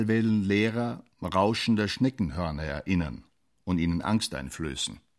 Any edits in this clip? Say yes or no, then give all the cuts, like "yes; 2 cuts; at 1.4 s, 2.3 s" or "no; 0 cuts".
no; 0 cuts